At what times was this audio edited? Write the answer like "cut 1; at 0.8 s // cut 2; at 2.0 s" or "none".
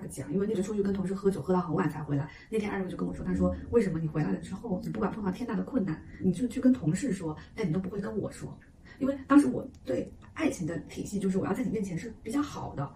none